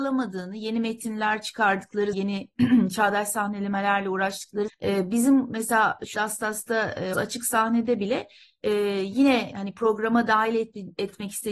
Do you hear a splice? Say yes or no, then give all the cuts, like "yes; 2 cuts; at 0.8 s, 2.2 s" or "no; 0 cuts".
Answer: yes; 4 cuts; at 2.1 s, 4.7 s, 6.1 s, 7.1 s